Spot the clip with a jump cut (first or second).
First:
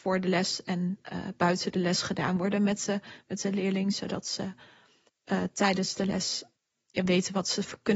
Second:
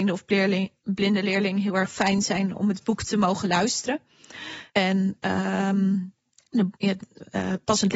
second